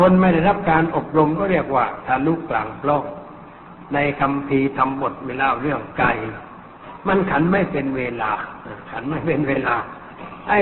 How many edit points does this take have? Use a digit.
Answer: 0